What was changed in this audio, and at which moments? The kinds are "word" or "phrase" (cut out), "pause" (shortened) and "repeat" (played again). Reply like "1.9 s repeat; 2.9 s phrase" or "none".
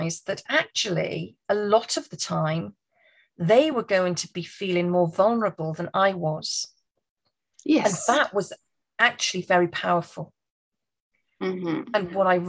none